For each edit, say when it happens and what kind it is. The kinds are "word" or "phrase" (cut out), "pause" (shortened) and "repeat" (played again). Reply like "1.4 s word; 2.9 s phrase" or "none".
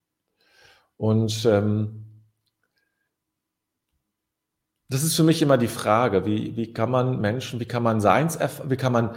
none